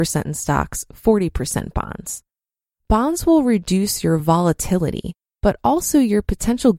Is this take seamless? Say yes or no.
yes